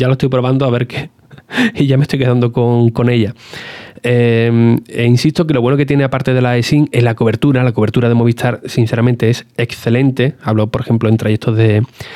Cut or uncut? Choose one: uncut